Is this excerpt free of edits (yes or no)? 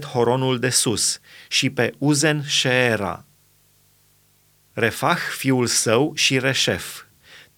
yes